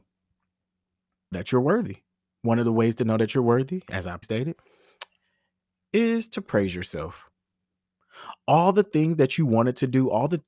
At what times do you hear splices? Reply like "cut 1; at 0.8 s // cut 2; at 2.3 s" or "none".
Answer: cut 1; at 1.3 s // cut 2; at 2.1 s // cut 3; at 4.2 s